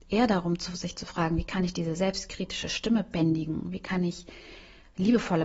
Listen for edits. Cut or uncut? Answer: uncut